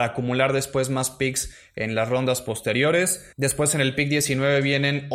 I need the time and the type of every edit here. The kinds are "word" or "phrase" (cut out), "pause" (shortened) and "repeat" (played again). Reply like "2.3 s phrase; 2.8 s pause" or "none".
3.3 s pause